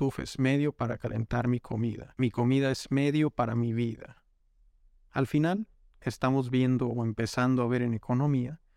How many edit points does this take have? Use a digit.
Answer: 0